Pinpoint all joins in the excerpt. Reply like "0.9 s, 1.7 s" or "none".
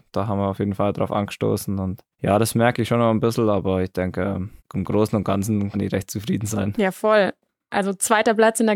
2.1 s, 4.6 s, 5.7 s